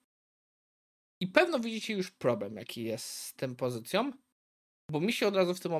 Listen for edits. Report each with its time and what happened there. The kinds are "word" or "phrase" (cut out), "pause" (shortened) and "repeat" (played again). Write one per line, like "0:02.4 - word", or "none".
none